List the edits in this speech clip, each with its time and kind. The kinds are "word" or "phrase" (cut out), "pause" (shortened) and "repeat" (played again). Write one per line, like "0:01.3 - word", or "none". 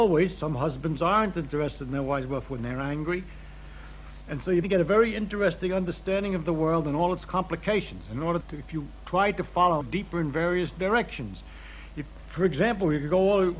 0:02.6 - phrase
0:04.6 - word
0:08.4 - word
0:09.8 - phrase
0:10.1 - phrase